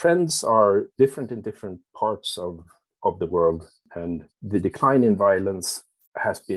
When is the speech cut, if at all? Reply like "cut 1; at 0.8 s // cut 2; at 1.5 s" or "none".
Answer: none